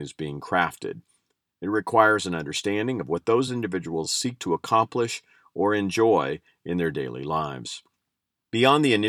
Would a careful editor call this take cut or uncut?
uncut